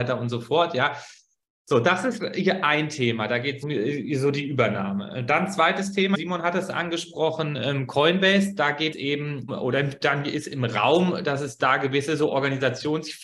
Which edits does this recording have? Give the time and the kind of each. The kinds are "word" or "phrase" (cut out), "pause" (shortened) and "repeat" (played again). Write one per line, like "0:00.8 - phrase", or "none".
0:03.6 - word
0:06.1 - word
0:08.9 - word
0:09.5 - word